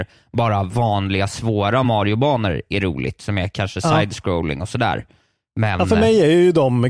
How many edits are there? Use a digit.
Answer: 0